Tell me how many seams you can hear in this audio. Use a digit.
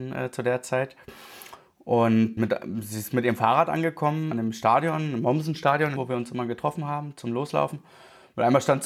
3